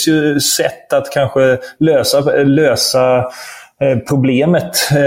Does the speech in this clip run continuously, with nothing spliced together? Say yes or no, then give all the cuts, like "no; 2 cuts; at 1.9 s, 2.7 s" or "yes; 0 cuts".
yes; 0 cuts